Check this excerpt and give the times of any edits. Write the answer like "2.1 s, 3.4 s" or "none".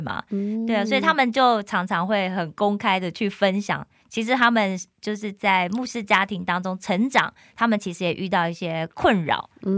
none

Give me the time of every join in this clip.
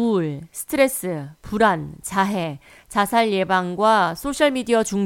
none

